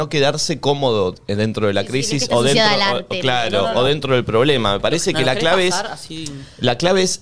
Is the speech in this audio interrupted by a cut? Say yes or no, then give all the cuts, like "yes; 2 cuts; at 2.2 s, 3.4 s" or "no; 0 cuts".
no; 0 cuts